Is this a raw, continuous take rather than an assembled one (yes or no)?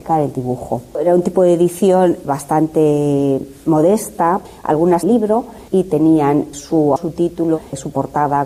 no